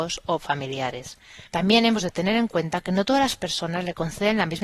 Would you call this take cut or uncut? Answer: cut